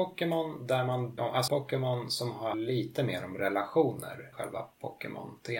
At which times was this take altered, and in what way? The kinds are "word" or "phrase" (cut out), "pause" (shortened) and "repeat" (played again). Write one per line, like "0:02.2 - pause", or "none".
0:01.2 - phrase
0:01.5 - word
0:02.5 - word
0:04.3 - word